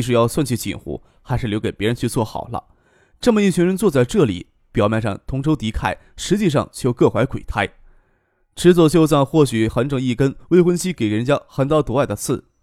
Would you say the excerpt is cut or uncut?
uncut